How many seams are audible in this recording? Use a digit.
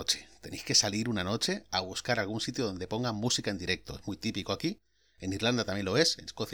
0